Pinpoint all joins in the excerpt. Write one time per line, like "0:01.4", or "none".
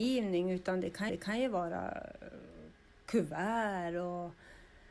0:01.1